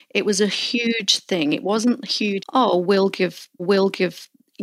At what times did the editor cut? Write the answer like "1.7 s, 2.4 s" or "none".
2.4 s, 3.6 s